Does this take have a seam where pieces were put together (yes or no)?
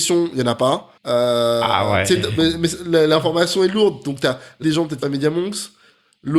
yes